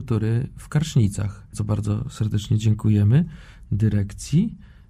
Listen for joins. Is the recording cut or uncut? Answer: cut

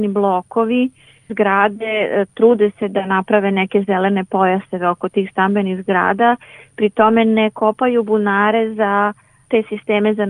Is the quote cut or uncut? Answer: uncut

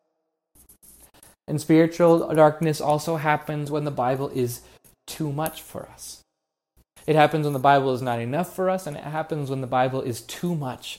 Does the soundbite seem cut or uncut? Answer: uncut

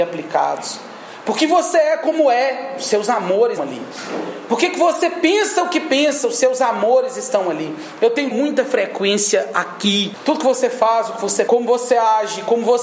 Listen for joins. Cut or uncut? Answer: cut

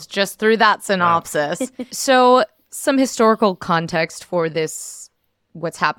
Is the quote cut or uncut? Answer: uncut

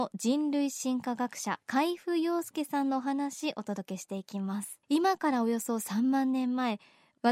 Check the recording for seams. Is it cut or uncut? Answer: cut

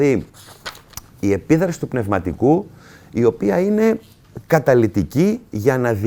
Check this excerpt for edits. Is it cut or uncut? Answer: uncut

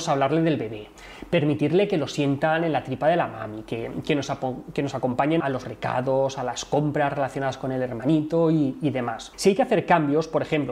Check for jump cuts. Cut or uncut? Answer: cut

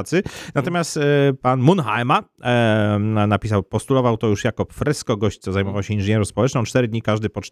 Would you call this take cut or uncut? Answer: uncut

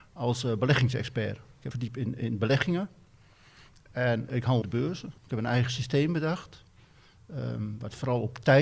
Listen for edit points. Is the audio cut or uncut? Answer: cut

